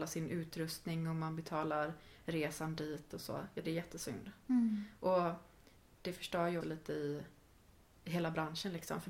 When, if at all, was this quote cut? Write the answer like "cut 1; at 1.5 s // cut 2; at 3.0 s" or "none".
cut 1; at 3.6 s // cut 2; at 6.6 s